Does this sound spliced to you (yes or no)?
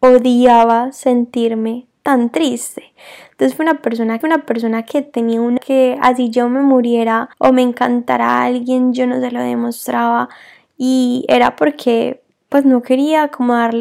yes